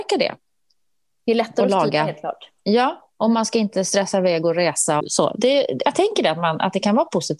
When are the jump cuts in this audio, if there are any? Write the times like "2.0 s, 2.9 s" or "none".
5.0 s